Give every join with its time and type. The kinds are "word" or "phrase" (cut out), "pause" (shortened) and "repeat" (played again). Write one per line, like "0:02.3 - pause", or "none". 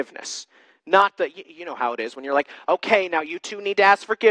none

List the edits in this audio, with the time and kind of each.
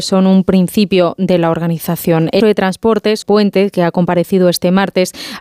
0:02.4 - word
0:03.2 - word

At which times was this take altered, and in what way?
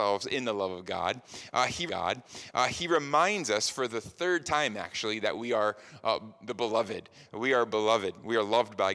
0:01.9 - repeat

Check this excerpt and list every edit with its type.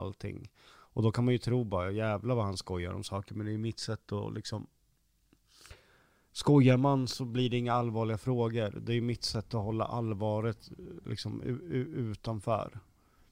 none

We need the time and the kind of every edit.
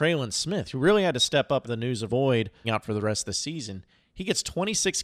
0:01.6 - word
0:02.1 - word
0:02.6 - word

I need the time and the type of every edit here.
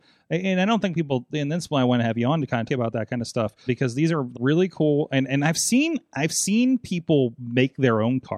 0:02.7 - word
0:03.7 - word
0:04.3 - word

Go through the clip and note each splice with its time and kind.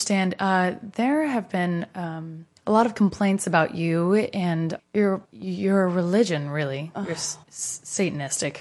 0:02.6 - pause
0:04.8 - word
0:05.2 - pause
0:07.4 - pause

